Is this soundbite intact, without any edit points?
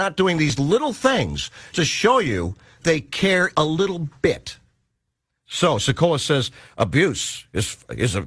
no; 3 cuts; at 1.7 s, 2.8 s, 3.5 s

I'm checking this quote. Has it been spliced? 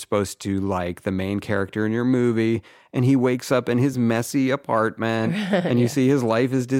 no; 0 cuts

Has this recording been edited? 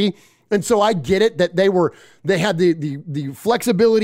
no; 0 cuts

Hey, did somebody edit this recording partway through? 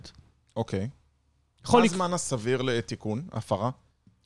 no; 0 cuts

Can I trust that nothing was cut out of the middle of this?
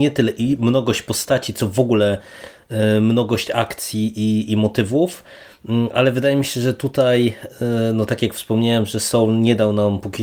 yes; 0 cuts

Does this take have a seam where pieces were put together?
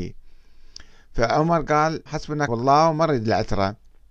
yes; 2 cuts; at 2.1 s, 2.5 s

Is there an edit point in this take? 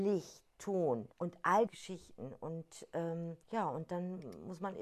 yes; 3 cuts; at 1.1 s, 1.7 s, 3.4 s

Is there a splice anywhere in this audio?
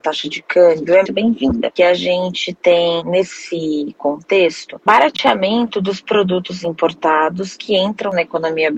yes; 3 cuts; at 1.0 s, 1.8 s, 4.9 s

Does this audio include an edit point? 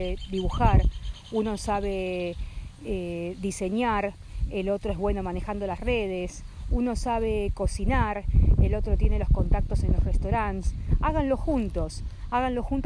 no; 0 cuts

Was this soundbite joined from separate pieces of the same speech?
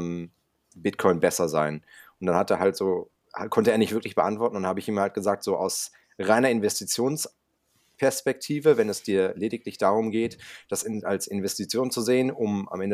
no; 0 cuts

